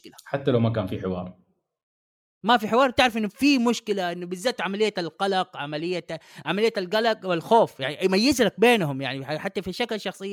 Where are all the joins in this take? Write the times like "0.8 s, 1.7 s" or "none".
none